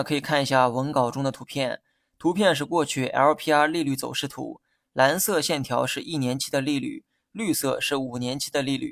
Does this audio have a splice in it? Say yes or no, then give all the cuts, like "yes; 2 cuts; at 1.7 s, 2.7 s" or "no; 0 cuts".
no; 0 cuts